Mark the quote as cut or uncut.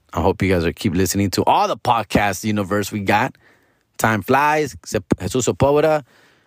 uncut